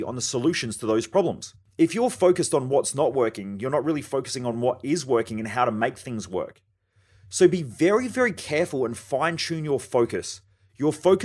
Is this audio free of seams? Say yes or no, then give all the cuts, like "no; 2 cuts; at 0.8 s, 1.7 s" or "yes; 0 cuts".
yes; 0 cuts